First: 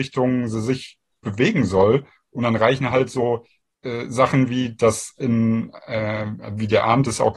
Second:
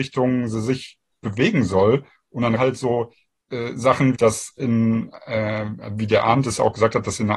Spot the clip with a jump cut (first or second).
second